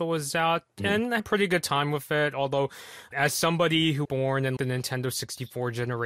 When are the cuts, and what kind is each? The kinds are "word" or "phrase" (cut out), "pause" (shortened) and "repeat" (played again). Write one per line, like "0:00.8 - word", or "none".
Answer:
0:01.2 - word
0:03.1 - word
0:04.0 - word
0:04.6 - word